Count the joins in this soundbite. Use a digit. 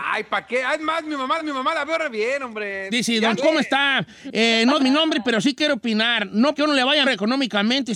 5